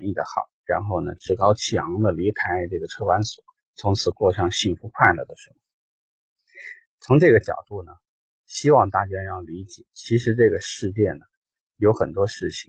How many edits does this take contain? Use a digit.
2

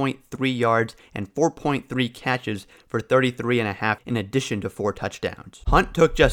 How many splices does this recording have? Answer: 1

